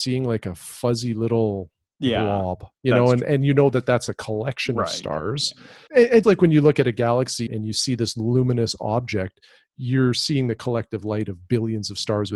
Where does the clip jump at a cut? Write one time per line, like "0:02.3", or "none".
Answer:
0:05.9
0:06.2
0:07.5